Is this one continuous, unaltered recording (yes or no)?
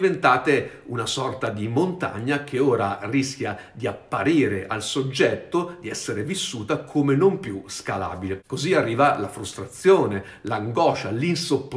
yes